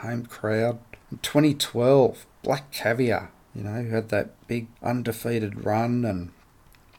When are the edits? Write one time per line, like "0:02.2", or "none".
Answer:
0:01.0
0:03.4
0:04.8